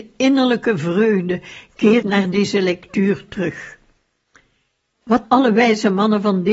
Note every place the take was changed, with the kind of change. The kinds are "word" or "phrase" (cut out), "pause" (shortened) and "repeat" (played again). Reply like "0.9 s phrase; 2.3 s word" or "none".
2.0 s word; 5.2 s word